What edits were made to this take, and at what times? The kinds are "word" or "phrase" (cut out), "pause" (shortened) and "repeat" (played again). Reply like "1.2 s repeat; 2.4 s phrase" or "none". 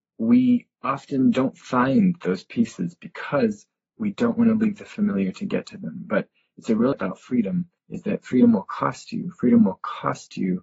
6.9 s phrase; 7.8 s pause

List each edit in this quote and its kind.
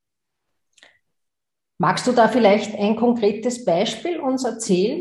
none

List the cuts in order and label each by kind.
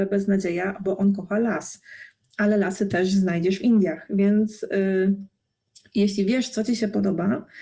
none

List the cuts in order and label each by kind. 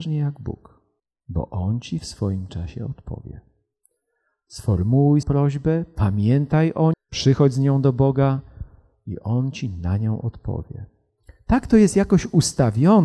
1.0 s pause; 5.2 s word; 6.9 s word

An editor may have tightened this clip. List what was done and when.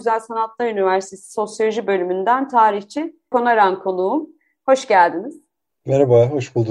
3.3 s word

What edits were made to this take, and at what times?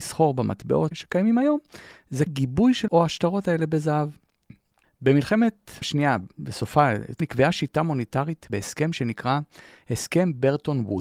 0.9 s word; 2.3 s word; 2.9 s word; 5.8 s word; 6.3 s pause; 7.2 s word; 8.5 s phrase

